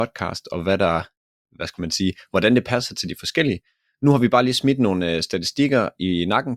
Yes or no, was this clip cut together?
no